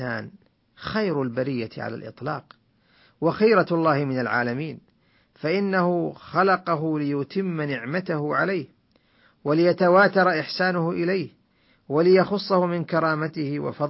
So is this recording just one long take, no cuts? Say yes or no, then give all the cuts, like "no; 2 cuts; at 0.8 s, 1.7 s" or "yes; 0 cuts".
yes; 0 cuts